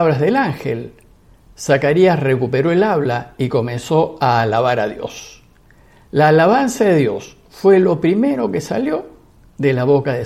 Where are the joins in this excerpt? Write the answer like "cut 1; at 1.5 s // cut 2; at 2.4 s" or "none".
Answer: none